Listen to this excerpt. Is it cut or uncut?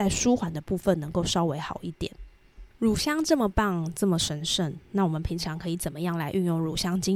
cut